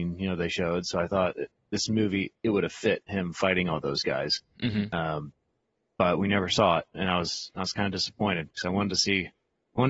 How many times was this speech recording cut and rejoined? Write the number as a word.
zero